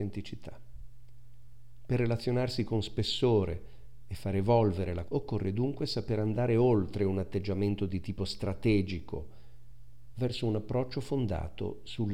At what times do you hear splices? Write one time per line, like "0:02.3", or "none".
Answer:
0:05.1